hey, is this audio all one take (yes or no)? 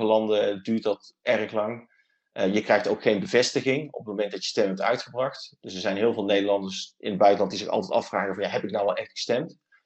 yes